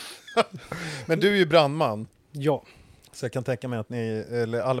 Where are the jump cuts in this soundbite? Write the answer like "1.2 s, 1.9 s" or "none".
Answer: none